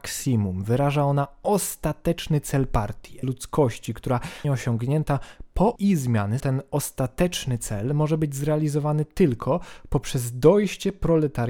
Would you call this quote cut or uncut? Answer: cut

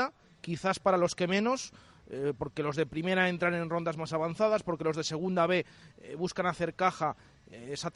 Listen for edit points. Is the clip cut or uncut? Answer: uncut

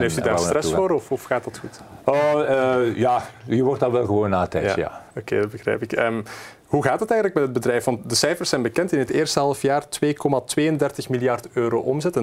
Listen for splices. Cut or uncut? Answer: cut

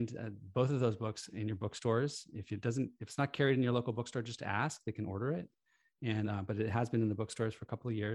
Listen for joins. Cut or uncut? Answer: uncut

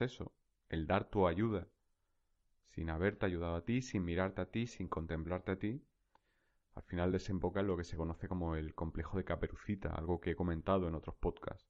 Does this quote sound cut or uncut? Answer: uncut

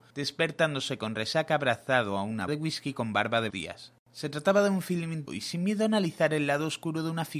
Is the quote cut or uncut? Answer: cut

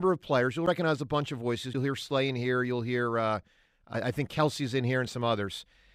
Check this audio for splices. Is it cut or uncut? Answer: uncut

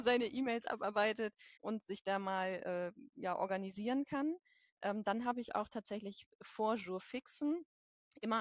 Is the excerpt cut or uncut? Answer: cut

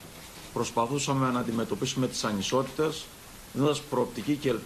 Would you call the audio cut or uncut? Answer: uncut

